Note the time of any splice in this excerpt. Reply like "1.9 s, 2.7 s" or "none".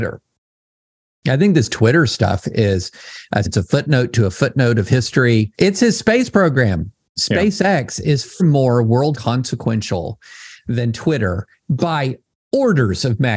3.4 s, 5.5 s, 8.4 s, 9.1 s